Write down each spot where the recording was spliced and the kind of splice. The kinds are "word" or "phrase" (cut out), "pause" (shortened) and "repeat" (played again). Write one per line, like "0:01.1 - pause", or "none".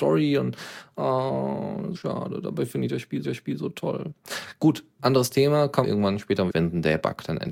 0:01.9 - word
0:03.2 - repeat
0:05.8 - phrase
0:06.5 - phrase